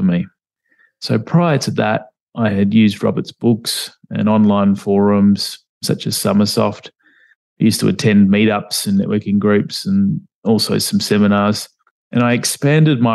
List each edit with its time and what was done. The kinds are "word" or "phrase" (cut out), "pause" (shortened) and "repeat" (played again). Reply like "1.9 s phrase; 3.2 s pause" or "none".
none